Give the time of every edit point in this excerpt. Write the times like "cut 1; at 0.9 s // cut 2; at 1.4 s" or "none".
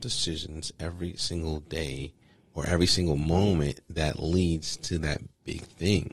none

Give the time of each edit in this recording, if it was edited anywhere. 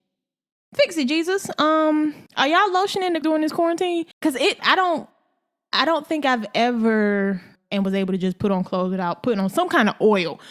cut 1; at 2.3 s // cut 2; at 3.2 s // cut 3; at 4.1 s // cut 4; at 4.6 s // cut 5; at 7.6 s

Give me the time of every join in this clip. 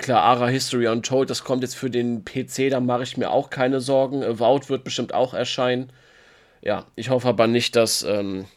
none

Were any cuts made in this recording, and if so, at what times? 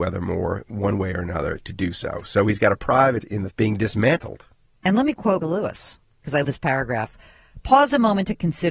cut 1; at 3.2 s // cut 2; at 3.5 s // cut 3; at 5.4 s // cut 4; at 6.4 s

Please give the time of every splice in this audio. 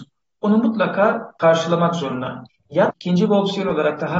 cut 1; at 2.9 s

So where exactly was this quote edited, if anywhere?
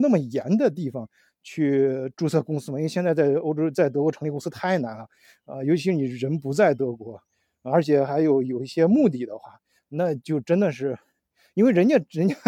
none

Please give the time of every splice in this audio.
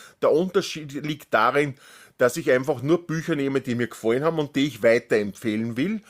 none

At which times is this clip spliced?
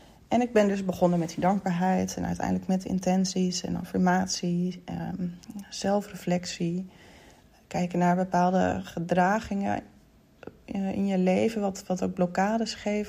none

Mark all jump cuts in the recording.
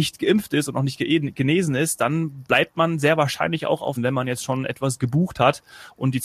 cut 1; at 4.0 s

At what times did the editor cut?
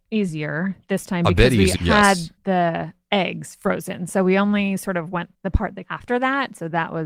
cut 1; at 1.8 s // cut 2; at 5.3 s // cut 3; at 5.8 s

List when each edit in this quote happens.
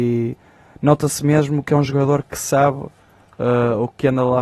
none

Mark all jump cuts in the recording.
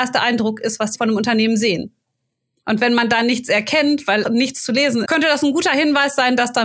cut 1; at 0.9 s // cut 2; at 4.2 s // cut 3; at 5.0 s

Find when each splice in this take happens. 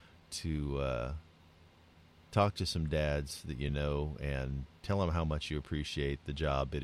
none

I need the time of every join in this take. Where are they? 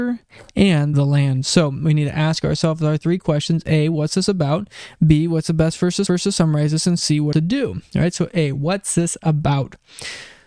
cut 1; at 0.9 s // cut 2; at 6.1 s // cut 3; at 7.3 s

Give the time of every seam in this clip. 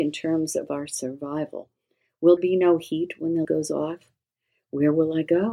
cut 1; at 2.4 s // cut 2; at 3.4 s

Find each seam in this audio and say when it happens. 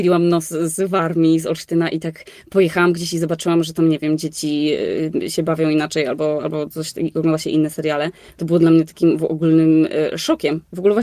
none

